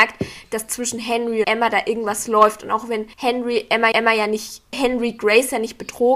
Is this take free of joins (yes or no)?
no